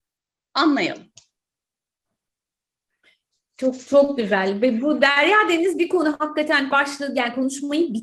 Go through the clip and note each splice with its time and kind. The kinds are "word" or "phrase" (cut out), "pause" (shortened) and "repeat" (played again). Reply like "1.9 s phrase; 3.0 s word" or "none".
6.7 s word